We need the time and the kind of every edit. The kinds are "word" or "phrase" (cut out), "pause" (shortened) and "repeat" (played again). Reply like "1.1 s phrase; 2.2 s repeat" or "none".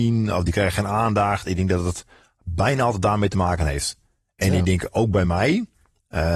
none